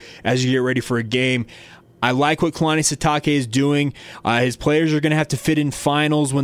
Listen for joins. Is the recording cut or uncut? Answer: uncut